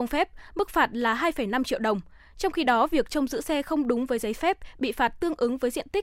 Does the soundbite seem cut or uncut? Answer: uncut